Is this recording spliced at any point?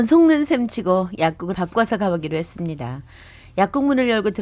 yes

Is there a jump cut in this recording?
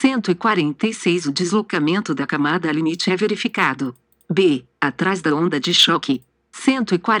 no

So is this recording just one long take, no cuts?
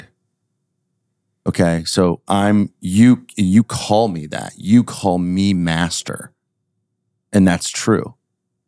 yes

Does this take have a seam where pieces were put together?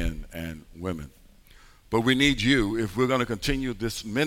no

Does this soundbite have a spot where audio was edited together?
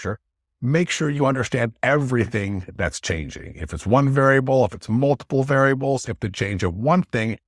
no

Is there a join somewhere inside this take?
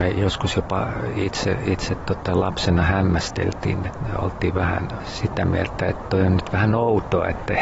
no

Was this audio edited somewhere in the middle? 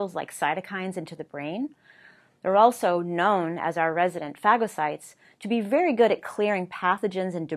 no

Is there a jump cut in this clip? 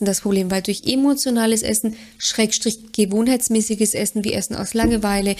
no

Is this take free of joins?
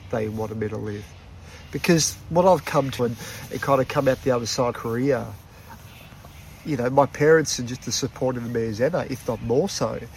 no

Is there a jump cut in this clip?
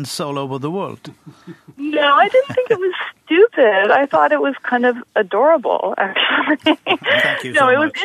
no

